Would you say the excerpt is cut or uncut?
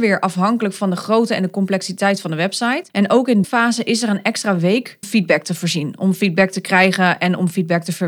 cut